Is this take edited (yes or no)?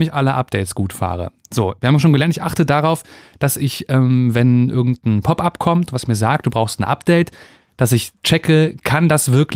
no